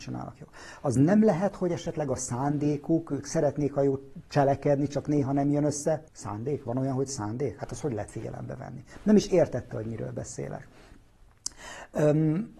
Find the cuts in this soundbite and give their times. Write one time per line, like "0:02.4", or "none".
0:06.1